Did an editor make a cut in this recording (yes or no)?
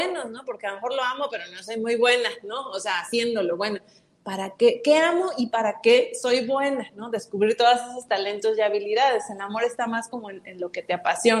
no